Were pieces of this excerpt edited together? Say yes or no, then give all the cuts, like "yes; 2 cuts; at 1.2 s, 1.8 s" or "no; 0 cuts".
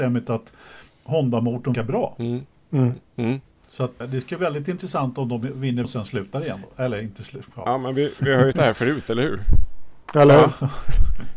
yes; 6 cuts; at 1.7 s, 4.0 s, 4.4 s, 5.8 s, 8.2 s, 8.5 s